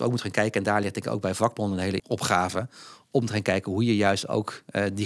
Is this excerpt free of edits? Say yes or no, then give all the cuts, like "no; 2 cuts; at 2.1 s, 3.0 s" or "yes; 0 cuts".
no; 1 cut; at 2.0 s